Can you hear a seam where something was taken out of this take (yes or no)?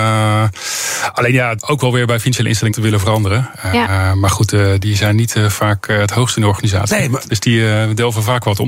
yes